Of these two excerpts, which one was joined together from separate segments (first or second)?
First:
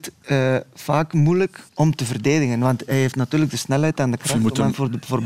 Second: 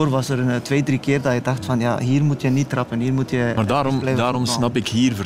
first